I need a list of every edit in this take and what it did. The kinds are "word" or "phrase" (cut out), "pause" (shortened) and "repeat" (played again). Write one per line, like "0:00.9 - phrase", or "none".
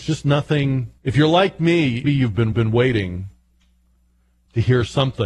0:01.0 - pause
0:02.0 - word
0:02.5 - repeat